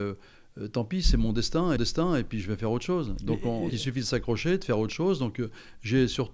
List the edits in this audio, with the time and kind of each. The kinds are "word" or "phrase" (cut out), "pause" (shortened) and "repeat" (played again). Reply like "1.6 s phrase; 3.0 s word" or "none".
1.8 s repeat; 3.7 s word